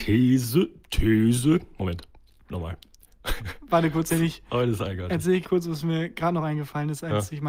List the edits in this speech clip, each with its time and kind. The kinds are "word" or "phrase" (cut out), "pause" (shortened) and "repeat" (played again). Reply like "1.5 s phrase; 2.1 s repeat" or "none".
4.1 s word; 5.4 s word